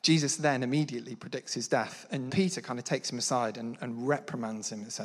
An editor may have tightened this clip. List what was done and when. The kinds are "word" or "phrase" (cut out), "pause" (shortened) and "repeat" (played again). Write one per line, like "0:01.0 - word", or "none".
0:02.3 - word